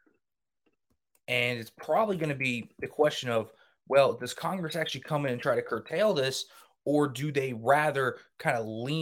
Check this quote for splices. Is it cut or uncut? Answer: uncut